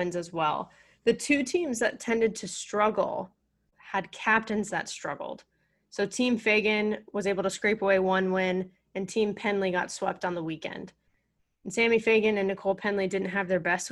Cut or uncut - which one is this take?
uncut